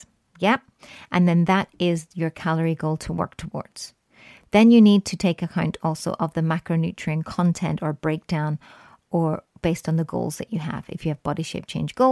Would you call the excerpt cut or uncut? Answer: uncut